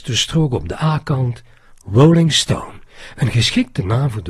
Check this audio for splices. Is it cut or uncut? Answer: uncut